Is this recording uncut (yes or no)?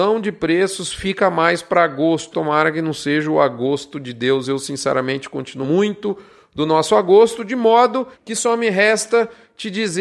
no